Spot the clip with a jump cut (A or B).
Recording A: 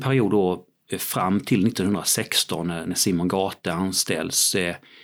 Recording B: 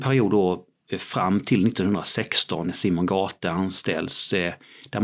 B